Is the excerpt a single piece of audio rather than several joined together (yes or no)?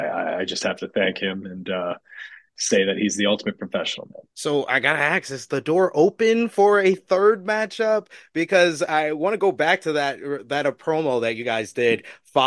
no